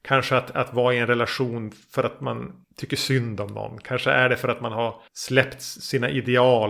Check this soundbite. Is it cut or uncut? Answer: cut